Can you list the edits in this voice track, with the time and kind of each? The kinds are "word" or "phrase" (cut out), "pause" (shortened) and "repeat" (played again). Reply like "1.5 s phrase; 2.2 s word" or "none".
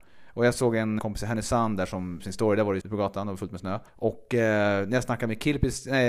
1.0 s word; 2.2 s word; 2.8 s word; 3.9 s pause